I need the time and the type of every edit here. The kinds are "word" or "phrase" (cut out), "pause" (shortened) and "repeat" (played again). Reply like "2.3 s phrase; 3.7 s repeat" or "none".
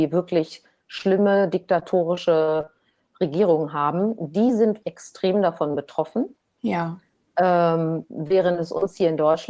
4.8 s word